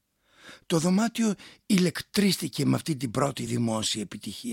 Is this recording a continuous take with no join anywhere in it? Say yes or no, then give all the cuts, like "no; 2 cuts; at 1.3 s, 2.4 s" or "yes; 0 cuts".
yes; 0 cuts